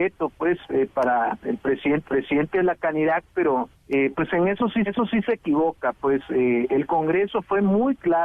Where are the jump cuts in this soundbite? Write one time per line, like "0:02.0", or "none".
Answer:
0:02.0
0:03.7
0:04.9